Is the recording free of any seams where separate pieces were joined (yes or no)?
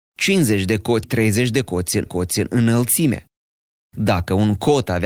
no